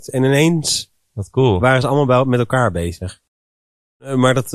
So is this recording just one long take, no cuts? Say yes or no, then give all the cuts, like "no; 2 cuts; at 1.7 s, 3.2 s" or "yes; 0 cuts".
yes; 0 cuts